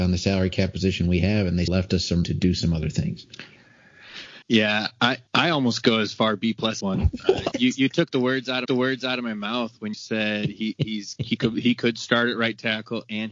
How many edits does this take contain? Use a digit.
8